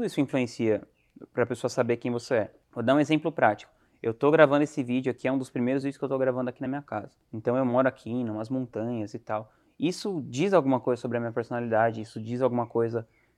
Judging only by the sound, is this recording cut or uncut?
uncut